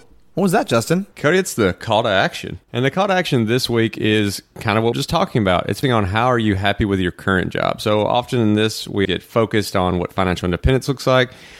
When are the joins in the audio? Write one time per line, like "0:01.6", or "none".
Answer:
0:01.1
0:02.6
0:04.9
0:05.8
0:09.0